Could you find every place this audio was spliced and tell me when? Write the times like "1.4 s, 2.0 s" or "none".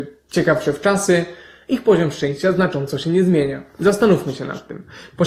none